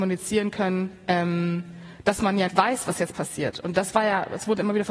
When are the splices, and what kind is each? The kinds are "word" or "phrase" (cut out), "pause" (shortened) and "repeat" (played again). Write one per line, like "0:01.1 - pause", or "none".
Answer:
0:02.5 - word

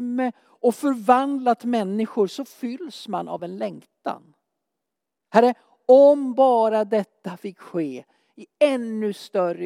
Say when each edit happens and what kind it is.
none

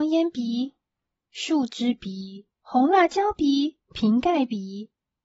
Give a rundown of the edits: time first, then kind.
0:02.5 - pause
0:03.8 - pause

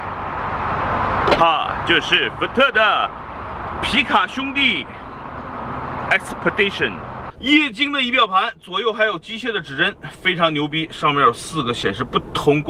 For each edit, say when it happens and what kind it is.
0:07.3 - pause

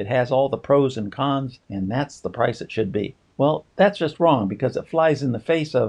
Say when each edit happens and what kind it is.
0:01.6 - pause
0:03.3 - pause

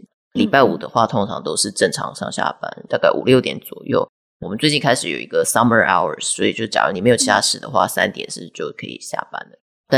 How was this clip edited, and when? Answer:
none

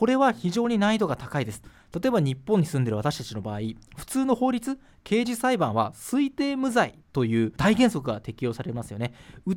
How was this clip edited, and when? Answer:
none

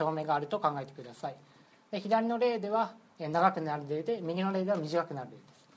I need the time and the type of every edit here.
none

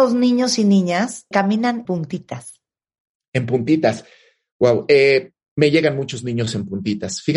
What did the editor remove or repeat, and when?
0:01.3 - word
0:01.8 - word

